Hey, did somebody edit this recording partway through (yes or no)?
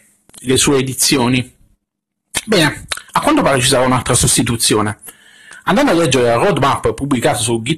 yes